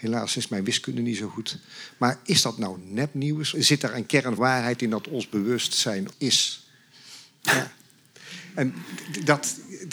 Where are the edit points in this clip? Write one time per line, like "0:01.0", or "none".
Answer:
0:03.5
0:04.4
0:06.1

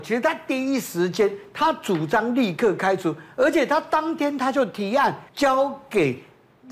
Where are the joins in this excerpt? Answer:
0:05.3

